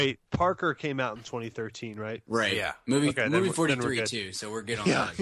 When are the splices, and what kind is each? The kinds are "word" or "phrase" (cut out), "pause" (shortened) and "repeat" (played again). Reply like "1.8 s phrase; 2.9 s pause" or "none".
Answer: none